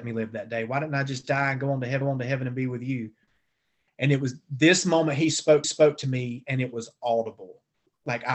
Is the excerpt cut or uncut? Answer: cut